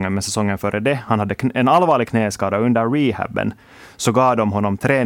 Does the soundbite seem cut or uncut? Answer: uncut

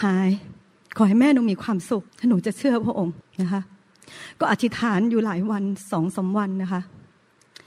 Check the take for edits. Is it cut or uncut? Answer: cut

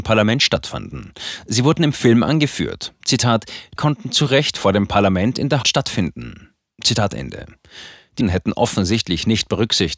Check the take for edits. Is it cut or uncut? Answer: cut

